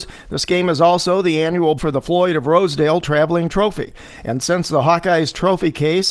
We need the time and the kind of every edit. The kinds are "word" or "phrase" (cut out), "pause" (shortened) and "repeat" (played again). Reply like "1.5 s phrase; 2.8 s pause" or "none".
1.8 s word